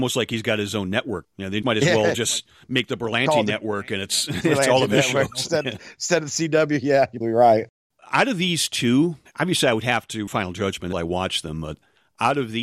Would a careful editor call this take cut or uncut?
cut